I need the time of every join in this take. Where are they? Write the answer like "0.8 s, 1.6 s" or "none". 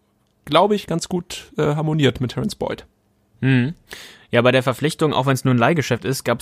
none